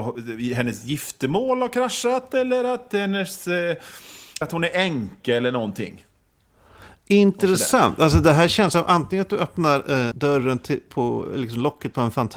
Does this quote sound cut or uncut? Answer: cut